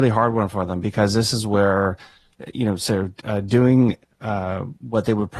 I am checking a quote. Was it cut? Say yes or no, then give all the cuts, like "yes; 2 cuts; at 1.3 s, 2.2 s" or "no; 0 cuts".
no; 0 cuts